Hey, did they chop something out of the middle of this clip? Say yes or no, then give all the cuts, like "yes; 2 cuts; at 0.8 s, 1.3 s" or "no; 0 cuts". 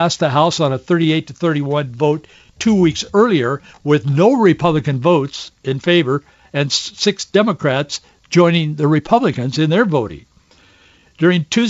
no; 0 cuts